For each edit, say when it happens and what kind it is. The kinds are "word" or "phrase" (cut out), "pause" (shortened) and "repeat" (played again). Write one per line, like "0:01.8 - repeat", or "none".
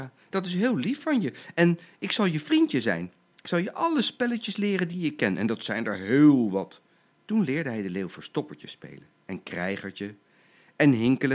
0:07.1 - pause